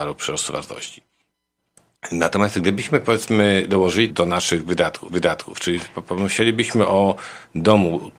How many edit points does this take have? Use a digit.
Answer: 2